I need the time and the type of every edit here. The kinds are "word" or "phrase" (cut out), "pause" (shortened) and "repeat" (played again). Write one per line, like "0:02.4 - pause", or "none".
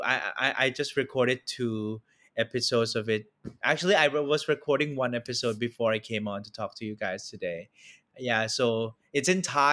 none